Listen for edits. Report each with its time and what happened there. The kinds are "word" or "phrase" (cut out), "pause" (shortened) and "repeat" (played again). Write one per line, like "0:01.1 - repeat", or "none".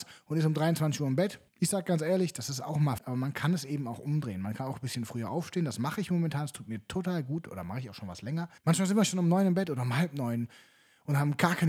0:01.5 - pause
0:03.0 - phrase
0:08.6 - pause